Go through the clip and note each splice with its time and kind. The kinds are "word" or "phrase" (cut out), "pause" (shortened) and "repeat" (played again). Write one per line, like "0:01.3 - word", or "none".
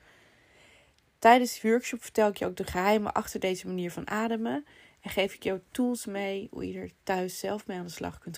none